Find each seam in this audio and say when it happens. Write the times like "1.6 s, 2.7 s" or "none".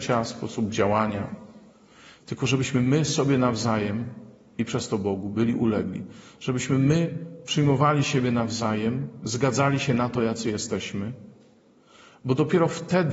none